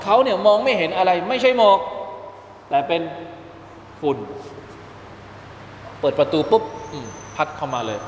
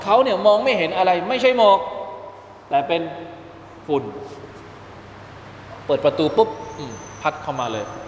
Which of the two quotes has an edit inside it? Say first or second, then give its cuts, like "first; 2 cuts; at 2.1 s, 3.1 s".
second; 1 cut; at 3.8 s